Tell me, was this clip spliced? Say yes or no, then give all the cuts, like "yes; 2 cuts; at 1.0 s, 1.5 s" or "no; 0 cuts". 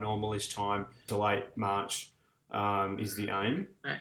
yes; 1 cut; at 1.1 s